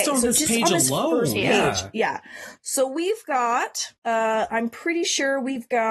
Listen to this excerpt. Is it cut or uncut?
cut